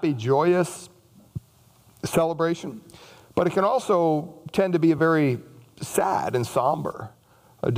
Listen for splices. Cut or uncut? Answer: uncut